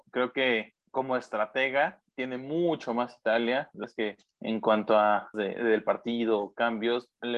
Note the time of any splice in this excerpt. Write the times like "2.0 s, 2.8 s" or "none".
3.8 s, 5.3 s